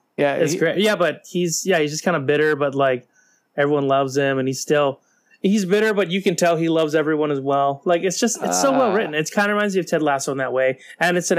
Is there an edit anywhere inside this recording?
no; 0 cuts

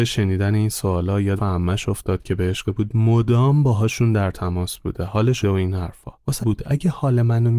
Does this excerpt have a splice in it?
yes; 4 cuts; at 1.4 s, 2.6 s, 5.4 s, 6.4 s

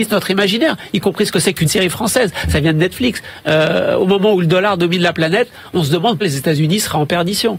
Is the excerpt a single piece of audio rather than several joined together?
no; 2 cuts; at 1.7 s, 6.2 s

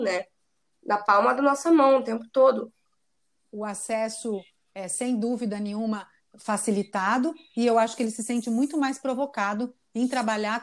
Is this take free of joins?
yes; 0 cuts

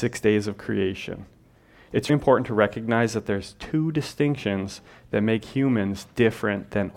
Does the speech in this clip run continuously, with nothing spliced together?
no; 1 cut; at 2.1 s

